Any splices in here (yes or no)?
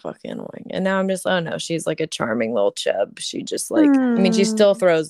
no